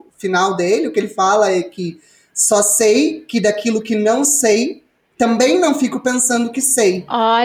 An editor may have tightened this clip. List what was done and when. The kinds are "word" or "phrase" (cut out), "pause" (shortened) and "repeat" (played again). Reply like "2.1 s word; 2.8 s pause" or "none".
none